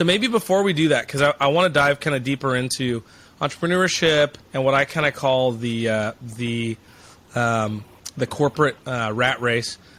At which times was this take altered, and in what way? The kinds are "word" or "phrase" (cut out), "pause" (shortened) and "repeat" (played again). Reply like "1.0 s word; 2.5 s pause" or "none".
4.4 s pause; 8.8 s pause